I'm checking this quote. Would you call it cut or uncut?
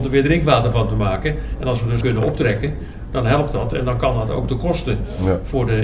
cut